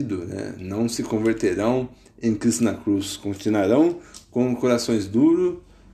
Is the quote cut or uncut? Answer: uncut